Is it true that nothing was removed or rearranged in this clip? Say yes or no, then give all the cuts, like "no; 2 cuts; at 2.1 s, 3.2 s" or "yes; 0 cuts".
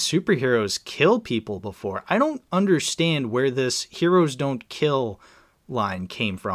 yes; 0 cuts